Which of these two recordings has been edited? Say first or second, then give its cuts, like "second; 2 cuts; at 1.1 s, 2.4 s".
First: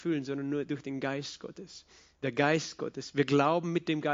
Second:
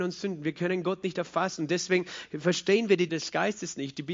second; 1 cut; at 3.1 s